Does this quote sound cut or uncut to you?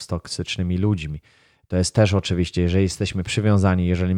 uncut